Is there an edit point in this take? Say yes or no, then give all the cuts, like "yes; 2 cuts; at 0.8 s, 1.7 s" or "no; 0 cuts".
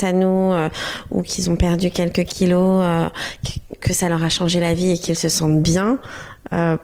yes; 1 cut; at 3.8 s